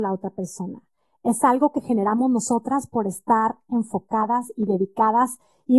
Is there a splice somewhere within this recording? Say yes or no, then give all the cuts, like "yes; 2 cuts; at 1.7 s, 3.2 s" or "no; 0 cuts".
no; 0 cuts